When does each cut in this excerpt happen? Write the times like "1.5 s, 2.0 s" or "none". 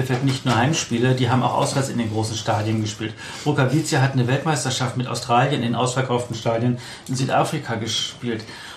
none